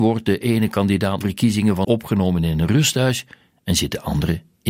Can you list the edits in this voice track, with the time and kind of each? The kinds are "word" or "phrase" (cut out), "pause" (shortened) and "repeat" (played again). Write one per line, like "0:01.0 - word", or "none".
0:01.2 - phrase
0:01.8 - word